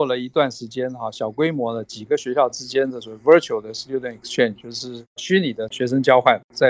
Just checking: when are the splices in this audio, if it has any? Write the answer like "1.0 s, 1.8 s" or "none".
none